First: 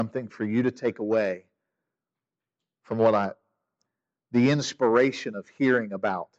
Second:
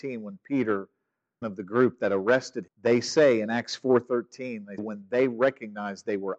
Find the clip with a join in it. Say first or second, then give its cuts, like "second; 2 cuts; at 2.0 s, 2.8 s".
second; 3 cuts; at 1.4 s, 2.7 s, 4.8 s